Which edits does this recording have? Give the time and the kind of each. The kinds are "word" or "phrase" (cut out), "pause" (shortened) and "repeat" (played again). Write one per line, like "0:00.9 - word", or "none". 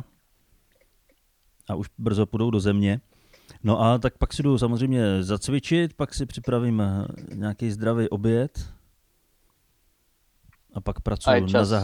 none